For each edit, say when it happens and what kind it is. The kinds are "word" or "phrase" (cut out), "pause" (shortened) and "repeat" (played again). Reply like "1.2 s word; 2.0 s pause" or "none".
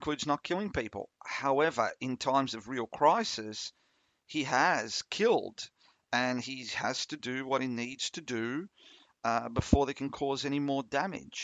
none

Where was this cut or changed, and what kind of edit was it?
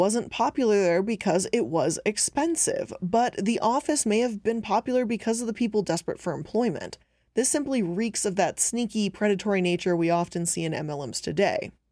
none

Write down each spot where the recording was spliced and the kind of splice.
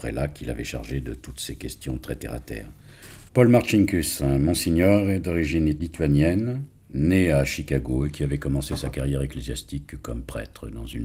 none

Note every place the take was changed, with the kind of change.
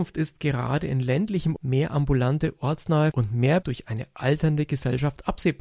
1.6 s word; 3.1 s word; 3.6 s word

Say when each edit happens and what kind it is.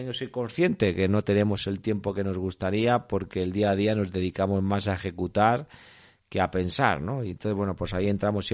none

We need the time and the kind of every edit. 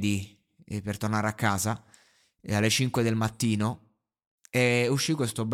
none

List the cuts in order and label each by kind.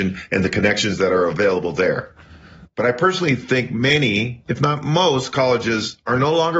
4.5 s pause

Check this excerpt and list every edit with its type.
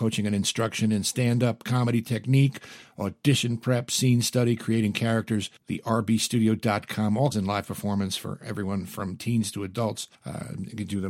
5.6 s pause; 7.3 s phrase; 10.1 s pause

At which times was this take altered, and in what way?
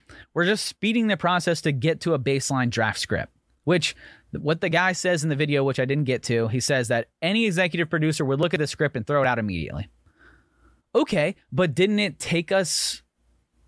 none

